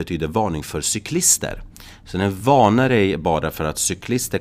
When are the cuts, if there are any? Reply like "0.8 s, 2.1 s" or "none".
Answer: none